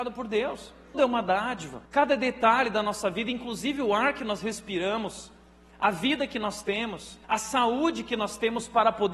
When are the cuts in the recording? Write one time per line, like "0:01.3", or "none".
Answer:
0:00.9
0:01.9
0:07.2